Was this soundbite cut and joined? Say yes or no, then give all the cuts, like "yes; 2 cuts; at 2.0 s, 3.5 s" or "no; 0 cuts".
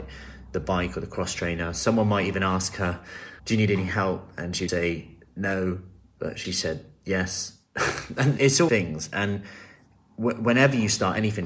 yes; 5 cuts; at 3.4 s, 4.7 s, 6.4 s, 8.4 s, 8.7 s